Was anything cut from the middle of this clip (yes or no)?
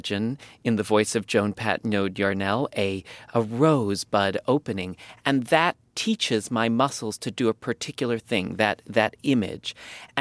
no